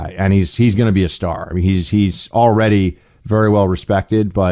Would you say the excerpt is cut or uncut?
uncut